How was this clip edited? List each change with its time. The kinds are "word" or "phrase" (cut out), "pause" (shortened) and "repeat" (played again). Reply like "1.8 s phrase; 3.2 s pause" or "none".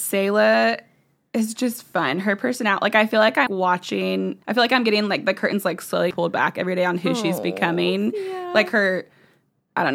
3.5 s word; 4.4 s pause; 6.1 s word